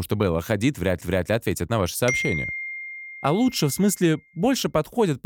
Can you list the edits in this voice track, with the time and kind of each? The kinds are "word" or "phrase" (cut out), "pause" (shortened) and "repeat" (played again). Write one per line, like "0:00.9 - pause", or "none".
0:01.0 - repeat